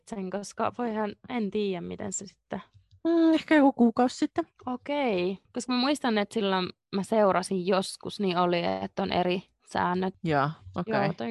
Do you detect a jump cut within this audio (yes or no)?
no